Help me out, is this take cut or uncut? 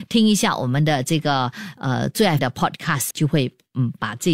cut